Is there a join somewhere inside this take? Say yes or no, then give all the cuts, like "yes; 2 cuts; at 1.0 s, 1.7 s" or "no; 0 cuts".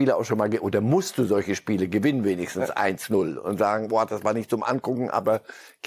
no; 0 cuts